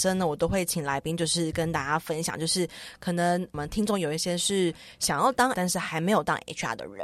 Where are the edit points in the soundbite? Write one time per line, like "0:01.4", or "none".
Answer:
0:05.5